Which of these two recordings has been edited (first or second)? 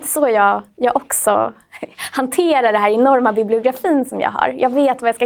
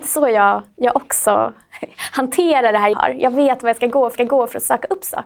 second